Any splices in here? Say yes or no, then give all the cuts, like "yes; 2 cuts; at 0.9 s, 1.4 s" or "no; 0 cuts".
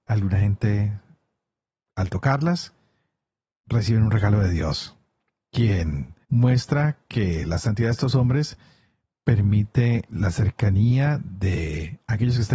yes; 1 cut; at 6.2 s